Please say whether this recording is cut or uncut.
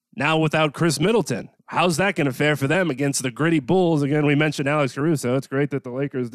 cut